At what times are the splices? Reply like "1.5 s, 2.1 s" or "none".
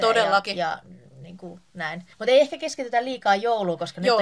2.1 s